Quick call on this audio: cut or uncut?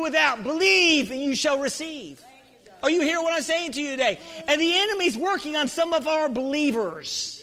uncut